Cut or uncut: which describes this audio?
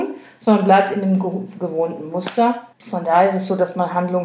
cut